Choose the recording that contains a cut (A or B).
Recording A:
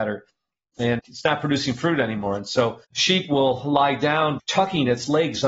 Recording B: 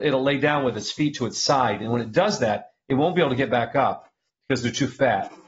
A